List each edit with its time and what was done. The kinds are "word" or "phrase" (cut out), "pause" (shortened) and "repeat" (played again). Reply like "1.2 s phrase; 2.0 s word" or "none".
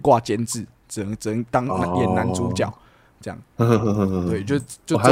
3.4 s pause